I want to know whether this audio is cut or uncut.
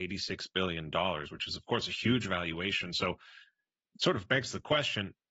uncut